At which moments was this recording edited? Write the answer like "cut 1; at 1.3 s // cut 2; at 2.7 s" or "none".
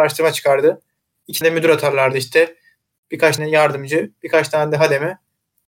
cut 1; at 1.4 s // cut 2; at 3.4 s